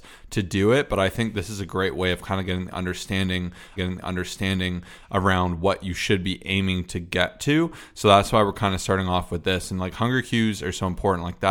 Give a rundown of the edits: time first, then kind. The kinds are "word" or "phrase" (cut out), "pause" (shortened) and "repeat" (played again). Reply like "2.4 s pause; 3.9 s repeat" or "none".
3.8 s repeat